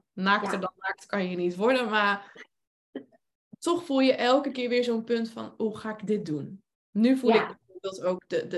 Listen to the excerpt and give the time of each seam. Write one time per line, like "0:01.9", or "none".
none